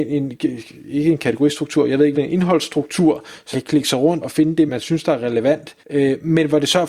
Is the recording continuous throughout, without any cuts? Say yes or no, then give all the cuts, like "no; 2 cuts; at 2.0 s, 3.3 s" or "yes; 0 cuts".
no; 5 cuts; at 2.1 s, 3.5 s, 4.2 s, 4.7 s, 5.8 s